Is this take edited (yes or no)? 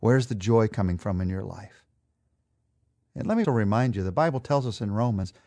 yes